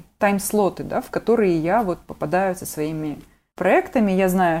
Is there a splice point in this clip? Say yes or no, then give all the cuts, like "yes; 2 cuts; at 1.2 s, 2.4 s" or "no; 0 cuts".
no; 0 cuts